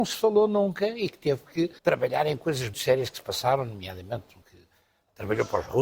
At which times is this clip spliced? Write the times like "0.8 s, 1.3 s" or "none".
1.8 s, 2.7 s, 4.4 s